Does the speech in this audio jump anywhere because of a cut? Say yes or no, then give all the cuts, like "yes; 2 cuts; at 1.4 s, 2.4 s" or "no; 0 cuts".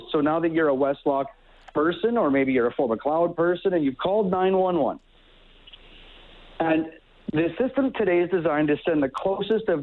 no; 0 cuts